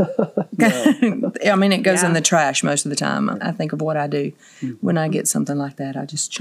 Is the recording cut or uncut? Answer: cut